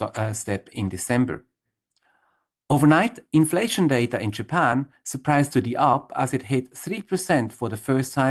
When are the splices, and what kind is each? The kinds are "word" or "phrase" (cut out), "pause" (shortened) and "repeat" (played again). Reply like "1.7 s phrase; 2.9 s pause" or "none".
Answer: none